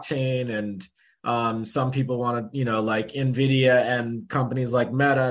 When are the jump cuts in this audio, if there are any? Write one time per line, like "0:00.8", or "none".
none